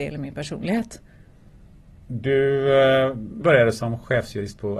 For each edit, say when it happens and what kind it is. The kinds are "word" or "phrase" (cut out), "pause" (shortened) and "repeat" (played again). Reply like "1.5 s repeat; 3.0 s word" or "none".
3.4 s word

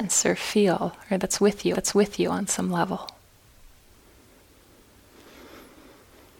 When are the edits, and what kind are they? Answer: 1.7 s repeat

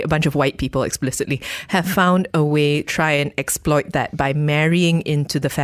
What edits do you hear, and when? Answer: 2.8 s word

